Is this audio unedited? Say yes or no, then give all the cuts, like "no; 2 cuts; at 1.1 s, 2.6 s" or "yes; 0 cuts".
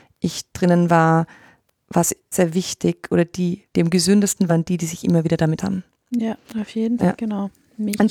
no; 6 cuts; at 2.3 s, 3.7 s, 4.5 s, 5.6 s, 6.4 s, 7.0 s